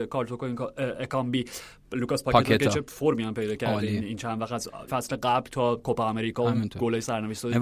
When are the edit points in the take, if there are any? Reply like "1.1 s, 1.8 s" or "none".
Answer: 4.9 s